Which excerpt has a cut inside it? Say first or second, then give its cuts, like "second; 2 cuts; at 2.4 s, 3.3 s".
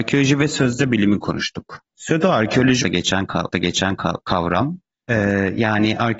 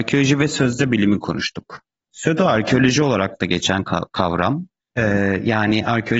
first; 3 cuts; at 1.9 s, 2.8 s, 3.5 s